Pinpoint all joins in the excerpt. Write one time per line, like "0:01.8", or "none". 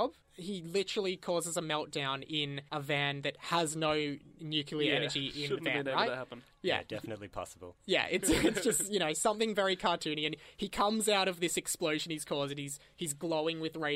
0:02.7
0:08.2